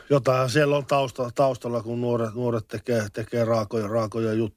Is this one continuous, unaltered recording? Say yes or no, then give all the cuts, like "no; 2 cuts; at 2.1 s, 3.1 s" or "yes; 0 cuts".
yes; 0 cuts